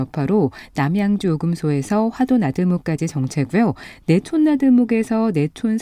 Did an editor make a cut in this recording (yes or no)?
no